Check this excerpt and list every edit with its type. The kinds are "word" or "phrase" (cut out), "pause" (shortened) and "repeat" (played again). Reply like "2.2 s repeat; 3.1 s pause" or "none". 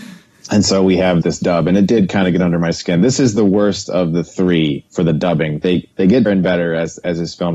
1.2 s word; 4.9 s pause; 5.9 s pause; 6.3 s word